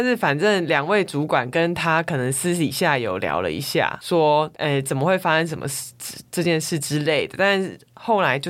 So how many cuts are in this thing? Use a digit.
0